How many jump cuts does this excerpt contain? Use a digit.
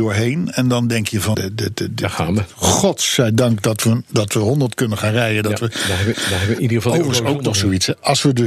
2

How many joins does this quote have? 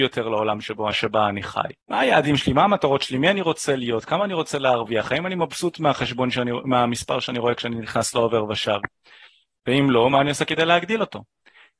2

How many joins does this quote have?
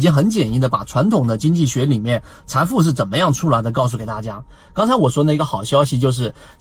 0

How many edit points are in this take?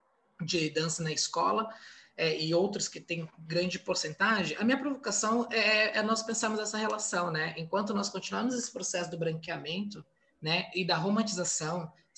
0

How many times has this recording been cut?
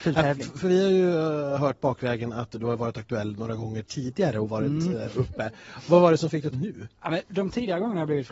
2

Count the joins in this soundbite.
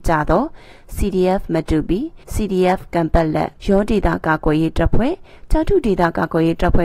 2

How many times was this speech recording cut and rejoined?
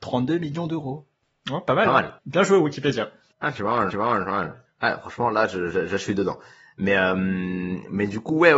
2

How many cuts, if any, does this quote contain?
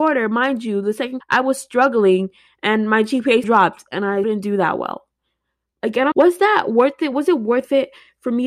4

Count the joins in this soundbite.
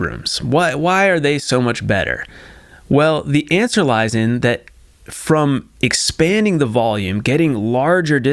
0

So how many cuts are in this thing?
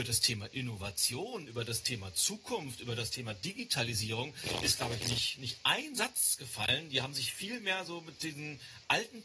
0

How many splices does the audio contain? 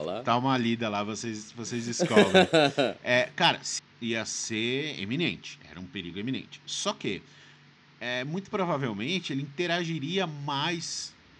1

